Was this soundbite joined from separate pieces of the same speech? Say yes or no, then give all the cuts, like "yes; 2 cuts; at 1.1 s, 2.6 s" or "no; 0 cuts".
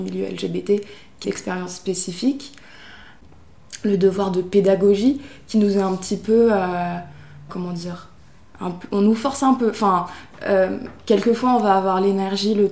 yes; 2 cuts; at 1.2 s, 7.5 s